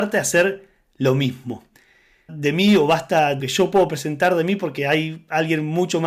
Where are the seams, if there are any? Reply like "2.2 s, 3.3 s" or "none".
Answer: 2.3 s, 3.4 s